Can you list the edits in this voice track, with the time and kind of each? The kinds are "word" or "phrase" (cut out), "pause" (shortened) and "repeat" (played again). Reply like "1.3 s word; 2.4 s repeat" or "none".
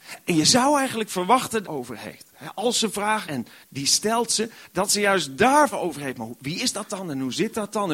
1.6 s phrase; 3.2 s word; 5.7 s word